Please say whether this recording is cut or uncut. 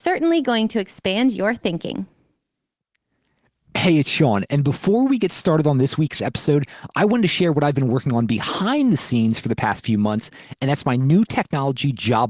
uncut